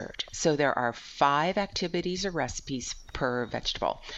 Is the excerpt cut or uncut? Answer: cut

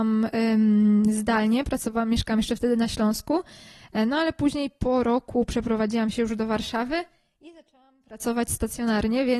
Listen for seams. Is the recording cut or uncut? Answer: uncut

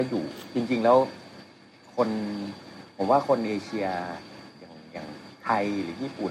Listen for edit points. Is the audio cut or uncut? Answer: uncut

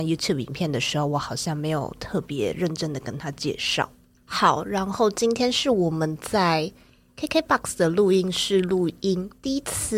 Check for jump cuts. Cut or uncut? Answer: uncut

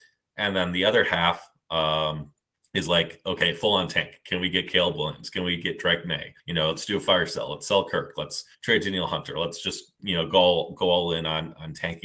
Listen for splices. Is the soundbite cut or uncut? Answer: cut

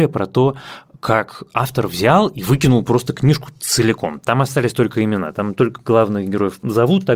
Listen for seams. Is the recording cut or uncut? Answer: uncut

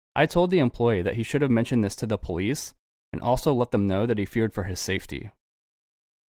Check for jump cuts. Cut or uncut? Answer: uncut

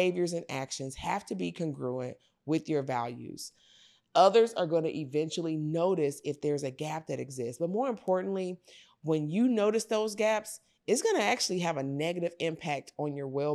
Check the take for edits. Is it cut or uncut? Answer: uncut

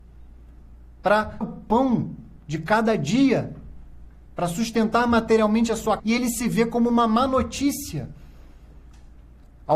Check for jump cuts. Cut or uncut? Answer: cut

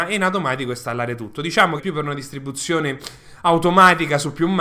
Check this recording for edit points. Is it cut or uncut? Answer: cut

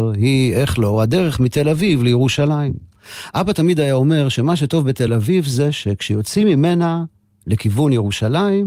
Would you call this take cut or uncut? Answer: uncut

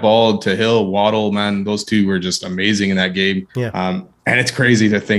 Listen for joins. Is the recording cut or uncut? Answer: cut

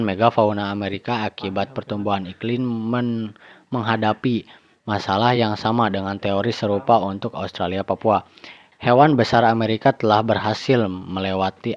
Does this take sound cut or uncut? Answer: uncut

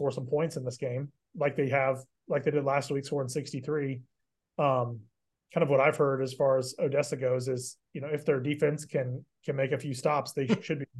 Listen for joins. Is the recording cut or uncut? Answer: uncut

